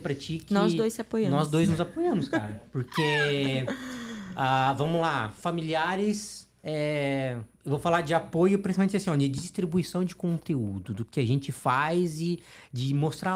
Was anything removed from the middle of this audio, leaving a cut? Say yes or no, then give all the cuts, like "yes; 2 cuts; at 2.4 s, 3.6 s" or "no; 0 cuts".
yes; 1 cut; at 6.6 s